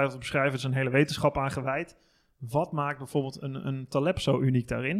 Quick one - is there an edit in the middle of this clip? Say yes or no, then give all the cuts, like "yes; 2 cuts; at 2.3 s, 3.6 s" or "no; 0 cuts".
no; 0 cuts